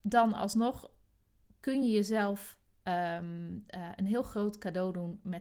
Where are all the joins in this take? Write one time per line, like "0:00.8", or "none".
none